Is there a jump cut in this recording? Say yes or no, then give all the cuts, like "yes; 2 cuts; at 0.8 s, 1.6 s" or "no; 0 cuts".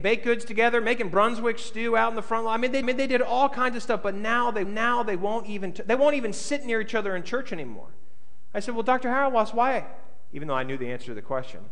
yes; 2 cuts; at 2.8 s, 4.6 s